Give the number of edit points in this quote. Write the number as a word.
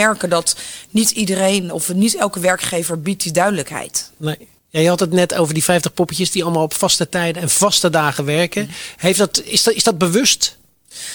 one